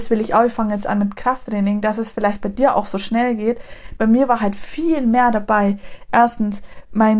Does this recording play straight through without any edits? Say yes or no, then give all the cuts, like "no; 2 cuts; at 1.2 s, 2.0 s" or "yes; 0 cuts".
yes; 0 cuts